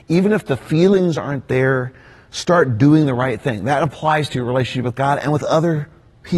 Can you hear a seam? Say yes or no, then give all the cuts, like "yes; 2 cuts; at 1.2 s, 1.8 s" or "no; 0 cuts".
no; 0 cuts